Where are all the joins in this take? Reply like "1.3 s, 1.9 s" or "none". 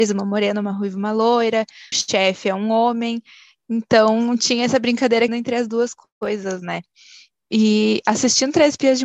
1.9 s, 5.3 s